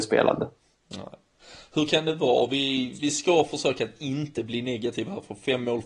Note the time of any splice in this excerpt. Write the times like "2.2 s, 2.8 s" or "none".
3.0 s

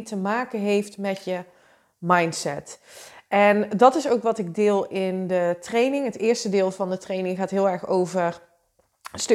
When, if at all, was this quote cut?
none

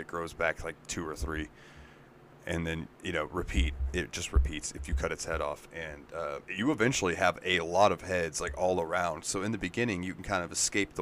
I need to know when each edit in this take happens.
6.4 s

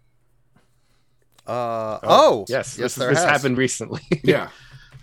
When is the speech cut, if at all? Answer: 2.5 s, 3.6 s

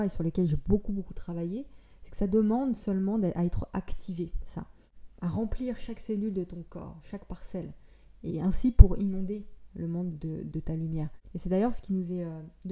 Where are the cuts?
8.3 s, 10.1 s

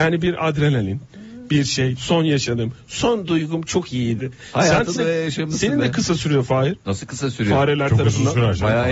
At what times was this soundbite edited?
5.0 s

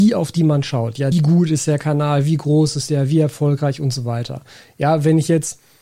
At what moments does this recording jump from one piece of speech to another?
1.1 s

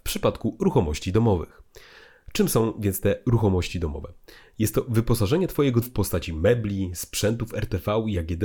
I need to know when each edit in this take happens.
5.8 s

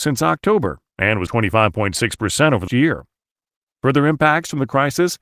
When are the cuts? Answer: 1.3 s, 2.7 s

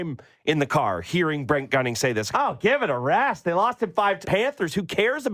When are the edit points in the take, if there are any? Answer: 2.3 s, 4.2 s

